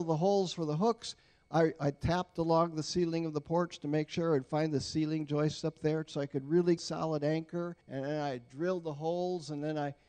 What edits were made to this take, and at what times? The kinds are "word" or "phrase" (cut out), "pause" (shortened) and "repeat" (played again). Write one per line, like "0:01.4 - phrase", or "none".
0:06.8 - phrase
0:07.8 - pause